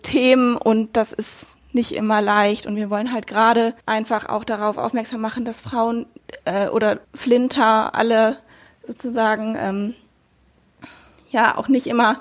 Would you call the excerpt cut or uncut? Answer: cut